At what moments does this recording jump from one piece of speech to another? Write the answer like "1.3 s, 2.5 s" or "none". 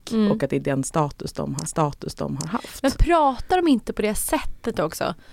1.7 s